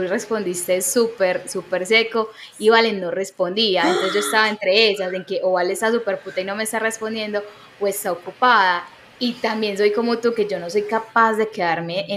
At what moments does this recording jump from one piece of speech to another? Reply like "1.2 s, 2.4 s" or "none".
none